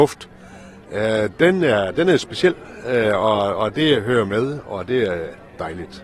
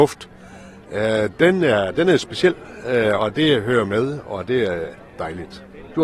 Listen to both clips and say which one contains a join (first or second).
second